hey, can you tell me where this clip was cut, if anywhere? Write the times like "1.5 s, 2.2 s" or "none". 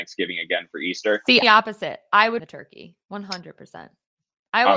1.4 s, 2.4 s